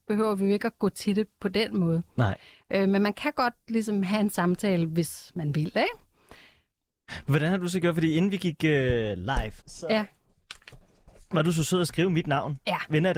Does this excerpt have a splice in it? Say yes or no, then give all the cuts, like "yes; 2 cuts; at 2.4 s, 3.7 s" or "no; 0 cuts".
yes; 1 cut; at 9.6 s